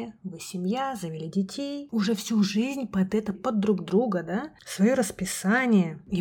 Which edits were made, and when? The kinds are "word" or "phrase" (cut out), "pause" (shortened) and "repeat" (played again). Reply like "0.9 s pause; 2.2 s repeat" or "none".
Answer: 3.3 s word